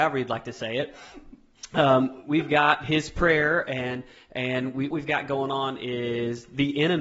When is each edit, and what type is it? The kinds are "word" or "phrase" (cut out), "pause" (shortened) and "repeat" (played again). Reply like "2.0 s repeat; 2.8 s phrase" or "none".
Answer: 4.9 s word